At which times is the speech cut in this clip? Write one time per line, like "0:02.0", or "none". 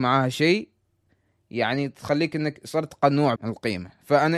0:03.4